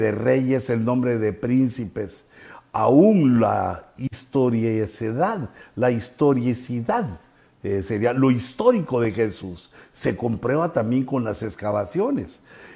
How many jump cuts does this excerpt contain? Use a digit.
0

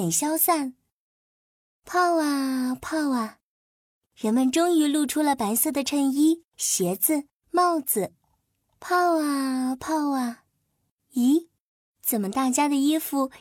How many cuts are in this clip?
0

